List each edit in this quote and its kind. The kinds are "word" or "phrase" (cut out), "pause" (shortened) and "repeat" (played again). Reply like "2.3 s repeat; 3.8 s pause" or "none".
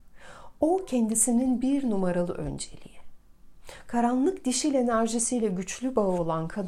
none